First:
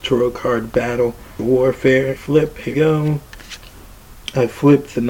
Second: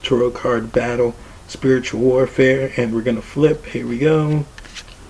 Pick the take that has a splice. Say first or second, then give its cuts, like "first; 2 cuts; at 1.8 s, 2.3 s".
first; 3 cuts; at 1.4 s, 2.2 s, 2.7 s